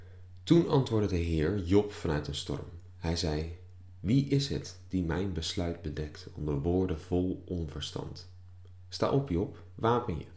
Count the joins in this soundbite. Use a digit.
0